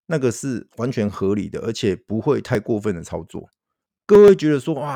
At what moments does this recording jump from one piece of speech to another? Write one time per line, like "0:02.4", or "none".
0:03.8